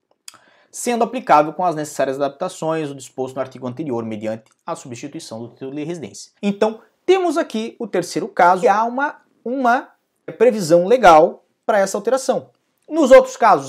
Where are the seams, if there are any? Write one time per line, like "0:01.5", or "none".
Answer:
0:06.4
0:08.6
0:10.3